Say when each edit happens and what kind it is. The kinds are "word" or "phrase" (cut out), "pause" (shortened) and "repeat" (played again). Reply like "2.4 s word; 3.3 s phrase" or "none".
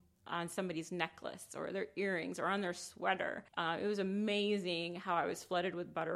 3.5 s pause